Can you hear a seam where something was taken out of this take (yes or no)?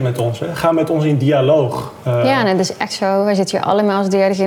yes